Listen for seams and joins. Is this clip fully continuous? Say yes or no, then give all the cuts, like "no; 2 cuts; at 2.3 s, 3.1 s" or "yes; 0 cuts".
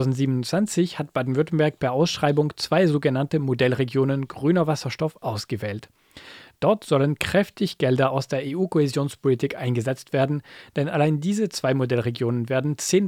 yes; 0 cuts